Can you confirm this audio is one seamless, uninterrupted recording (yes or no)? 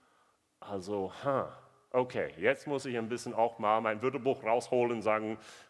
yes